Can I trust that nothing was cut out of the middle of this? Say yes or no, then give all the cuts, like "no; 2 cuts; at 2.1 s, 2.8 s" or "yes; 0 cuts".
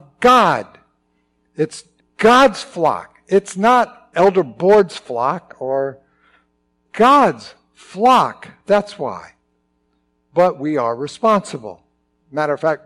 no; 3 cuts; at 2.0 s, 4.1 s, 6.9 s